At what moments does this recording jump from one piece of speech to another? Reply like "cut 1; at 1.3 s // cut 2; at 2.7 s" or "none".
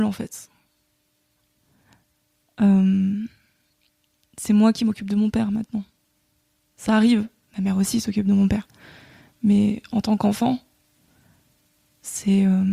none